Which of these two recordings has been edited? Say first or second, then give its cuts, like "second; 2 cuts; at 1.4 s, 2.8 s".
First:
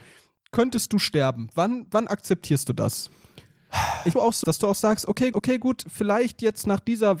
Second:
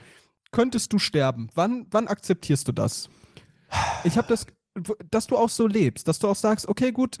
first; 3 cuts; at 4.1 s, 4.4 s, 5.3 s